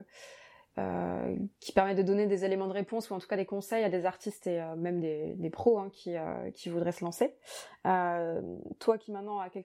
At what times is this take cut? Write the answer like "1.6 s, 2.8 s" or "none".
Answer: none

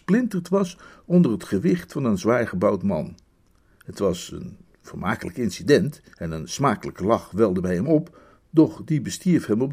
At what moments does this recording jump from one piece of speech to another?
6.1 s

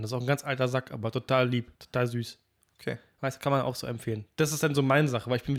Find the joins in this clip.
1.7 s

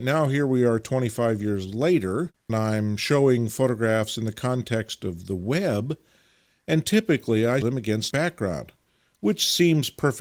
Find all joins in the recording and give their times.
2.5 s, 7.6 s, 8.1 s

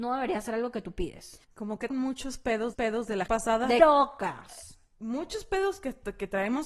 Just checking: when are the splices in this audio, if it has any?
1.4 s, 1.9 s, 2.7 s, 3.3 s, 3.8 s

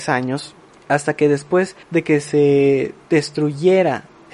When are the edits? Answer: 1.8 s, 3.0 s

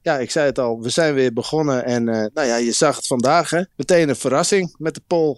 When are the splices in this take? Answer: 3.7 s

